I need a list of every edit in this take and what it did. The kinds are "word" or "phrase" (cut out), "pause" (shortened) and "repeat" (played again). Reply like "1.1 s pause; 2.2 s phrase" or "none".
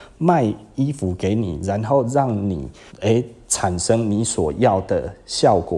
2.9 s pause